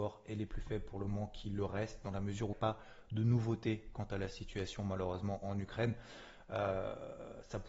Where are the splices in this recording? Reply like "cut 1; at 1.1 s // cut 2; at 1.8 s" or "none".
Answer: cut 1; at 2.5 s